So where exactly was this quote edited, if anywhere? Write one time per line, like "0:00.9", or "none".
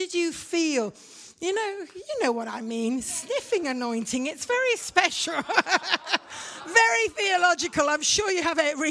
none